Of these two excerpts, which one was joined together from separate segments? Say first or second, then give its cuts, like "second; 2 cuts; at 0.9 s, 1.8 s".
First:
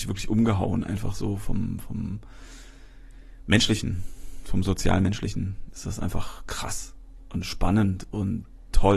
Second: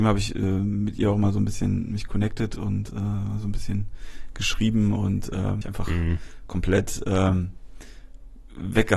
second; 1 cut; at 5.6 s